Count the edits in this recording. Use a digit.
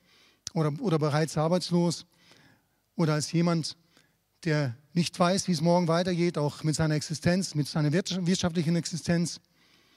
0